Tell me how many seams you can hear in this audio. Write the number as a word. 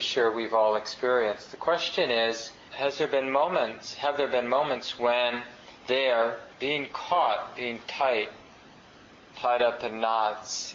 two